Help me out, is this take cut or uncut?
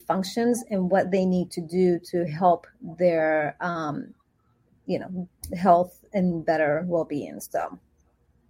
uncut